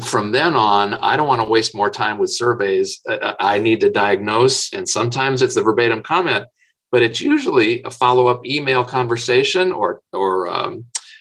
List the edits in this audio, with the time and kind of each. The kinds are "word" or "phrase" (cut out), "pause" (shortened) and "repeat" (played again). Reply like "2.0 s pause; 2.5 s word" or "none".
none